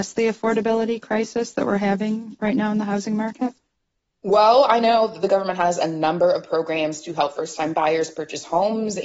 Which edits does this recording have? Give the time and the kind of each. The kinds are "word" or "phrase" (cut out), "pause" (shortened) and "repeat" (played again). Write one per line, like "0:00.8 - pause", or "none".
none